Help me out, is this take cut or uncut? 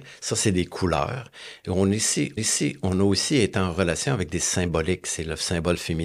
cut